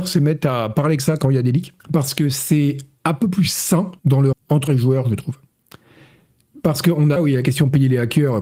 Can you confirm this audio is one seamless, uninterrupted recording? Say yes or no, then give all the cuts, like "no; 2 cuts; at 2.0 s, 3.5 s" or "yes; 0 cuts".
no; 6 cuts; at 1.0 s, 1.8 s, 4.0 s, 4.3 s, 4.7 s, 7.2 s